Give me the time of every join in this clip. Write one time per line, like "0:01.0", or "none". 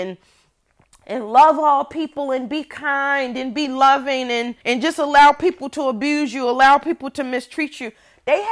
0:04.6